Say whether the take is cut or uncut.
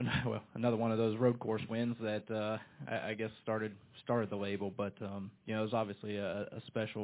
uncut